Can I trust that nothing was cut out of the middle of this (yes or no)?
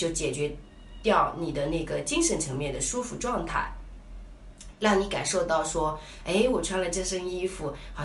yes